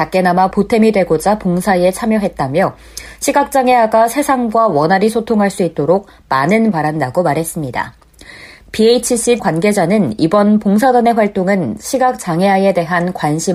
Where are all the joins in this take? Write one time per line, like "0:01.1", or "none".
0:06.7
0:09.4